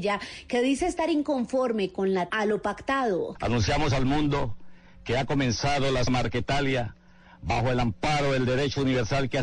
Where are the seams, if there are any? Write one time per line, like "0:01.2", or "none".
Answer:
0:02.3
0:06.1